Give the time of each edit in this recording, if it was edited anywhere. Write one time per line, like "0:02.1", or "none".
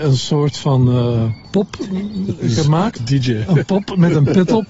0:02.4
0:03.0